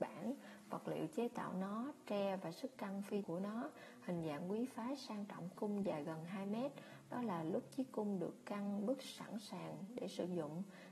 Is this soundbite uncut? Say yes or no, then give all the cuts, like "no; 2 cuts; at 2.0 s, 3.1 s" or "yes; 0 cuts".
no; 2 cuts; at 3.2 s, 5.5 s